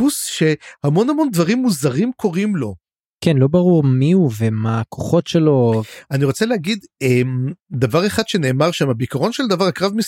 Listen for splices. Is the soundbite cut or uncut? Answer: cut